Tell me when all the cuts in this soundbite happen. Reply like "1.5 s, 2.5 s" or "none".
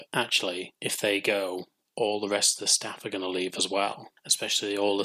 none